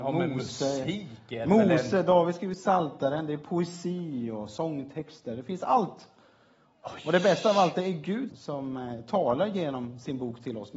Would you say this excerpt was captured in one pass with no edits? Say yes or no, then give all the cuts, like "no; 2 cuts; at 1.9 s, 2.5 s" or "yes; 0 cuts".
no; 1 cut; at 8.3 s